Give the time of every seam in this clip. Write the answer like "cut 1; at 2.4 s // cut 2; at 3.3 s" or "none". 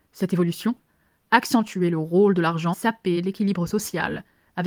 cut 1; at 2.7 s